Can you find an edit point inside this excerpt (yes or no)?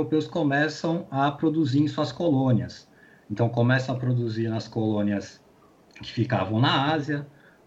no